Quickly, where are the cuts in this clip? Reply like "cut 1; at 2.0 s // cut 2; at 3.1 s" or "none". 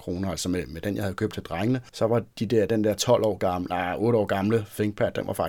none